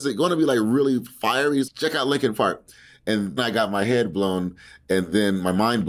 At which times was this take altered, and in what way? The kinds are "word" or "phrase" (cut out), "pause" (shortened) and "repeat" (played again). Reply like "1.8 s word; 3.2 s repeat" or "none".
1.7 s word; 3.4 s word